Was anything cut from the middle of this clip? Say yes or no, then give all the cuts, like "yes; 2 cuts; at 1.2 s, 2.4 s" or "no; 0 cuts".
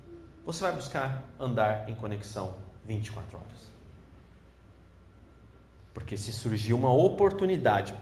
yes; 1 cut; at 2.8 s